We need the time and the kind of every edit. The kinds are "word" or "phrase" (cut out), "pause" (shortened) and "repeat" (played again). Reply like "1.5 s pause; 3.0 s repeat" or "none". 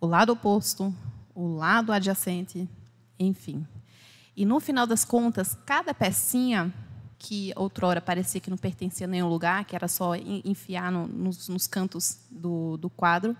7.1 s pause